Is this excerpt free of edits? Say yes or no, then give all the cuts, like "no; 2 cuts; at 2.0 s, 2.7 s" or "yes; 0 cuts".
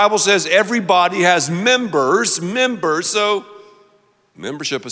yes; 0 cuts